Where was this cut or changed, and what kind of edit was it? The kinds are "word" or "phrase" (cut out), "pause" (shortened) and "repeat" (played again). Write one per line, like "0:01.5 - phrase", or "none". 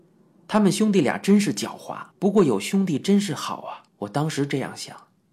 0:02.1 - pause
0:03.9 - pause